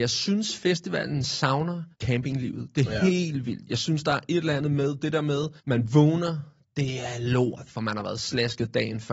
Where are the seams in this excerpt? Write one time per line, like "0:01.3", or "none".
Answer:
0:01.9
0:05.6